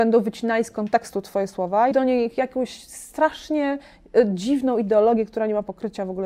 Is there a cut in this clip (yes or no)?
yes